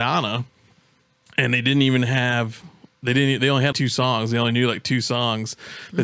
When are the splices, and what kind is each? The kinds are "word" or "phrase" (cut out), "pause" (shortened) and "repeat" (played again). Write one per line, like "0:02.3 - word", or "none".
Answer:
0:03.7 - word

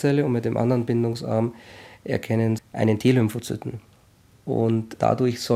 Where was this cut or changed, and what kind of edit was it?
0:02.6 - word

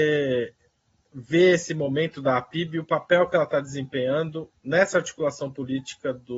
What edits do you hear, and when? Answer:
none

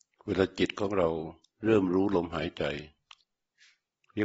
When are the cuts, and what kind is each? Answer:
0:01.4 - pause

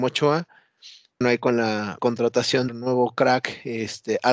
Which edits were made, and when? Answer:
0:01.2 - word
0:02.0 - word
0:02.7 - phrase

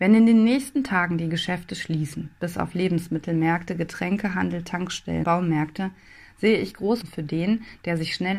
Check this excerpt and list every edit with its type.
0:05.2 - word
0:07.0 - word

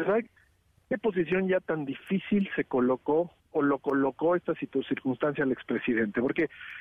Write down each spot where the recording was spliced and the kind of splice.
0:03.4 - pause

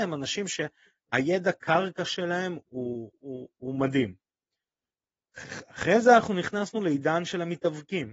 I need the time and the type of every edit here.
none

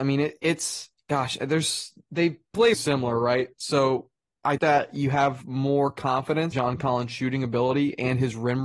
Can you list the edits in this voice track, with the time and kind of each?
0:00.9 - pause
0:02.7 - word
0:04.6 - word
0:06.5 - word

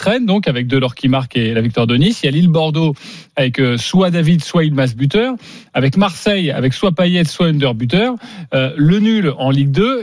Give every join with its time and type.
none

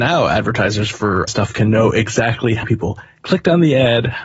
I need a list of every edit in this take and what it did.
0:01.3 - word
0:02.6 - word

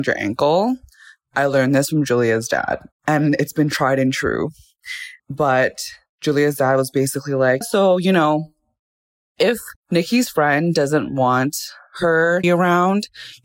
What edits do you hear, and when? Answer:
0:02.9 - pause
0:05.2 - pause
0:07.6 - word
0:09.8 - pause
0:12.4 - phrase

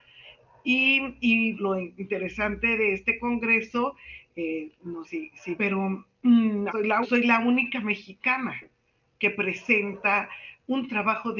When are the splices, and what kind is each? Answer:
0:01.6 - word
0:05.0 - word
0:05.6 - phrase
0:06.7 - phrase
0:07.0 - phrase

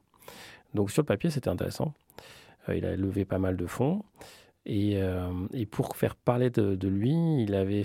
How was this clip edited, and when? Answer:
none

